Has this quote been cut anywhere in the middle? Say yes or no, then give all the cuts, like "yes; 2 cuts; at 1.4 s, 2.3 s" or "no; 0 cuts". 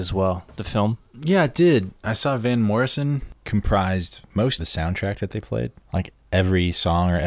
yes; 1 cut; at 4.6 s